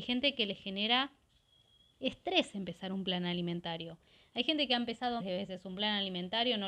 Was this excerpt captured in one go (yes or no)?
no